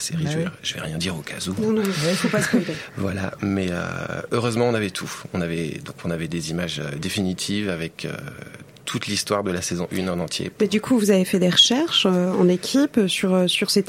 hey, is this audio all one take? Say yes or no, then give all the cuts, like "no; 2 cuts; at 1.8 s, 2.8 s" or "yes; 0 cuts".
yes; 0 cuts